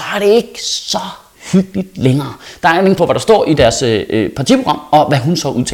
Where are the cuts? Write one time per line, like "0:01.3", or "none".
0:03.0